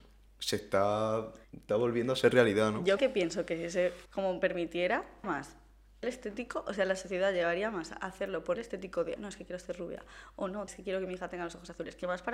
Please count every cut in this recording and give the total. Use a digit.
8